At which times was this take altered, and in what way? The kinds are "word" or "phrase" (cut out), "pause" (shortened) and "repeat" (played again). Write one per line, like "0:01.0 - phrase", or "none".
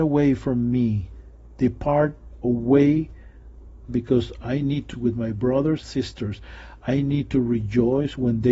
0:03.9 - phrase
0:04.9 - word
0:05.8 - word